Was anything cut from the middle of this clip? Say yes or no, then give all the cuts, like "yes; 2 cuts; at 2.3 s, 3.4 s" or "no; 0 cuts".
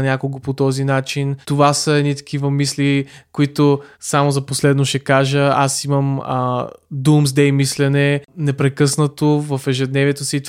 yes; 2 cuts; at 1.4 s, 3.9 s